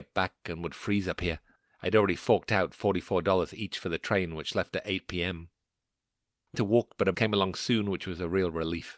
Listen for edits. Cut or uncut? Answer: cut